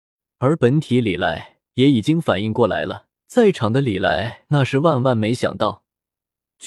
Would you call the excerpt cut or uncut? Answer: cut